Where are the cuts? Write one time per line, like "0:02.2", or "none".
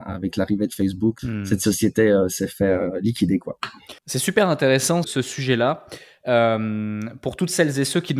0:01.2
0:04.0
0:05.0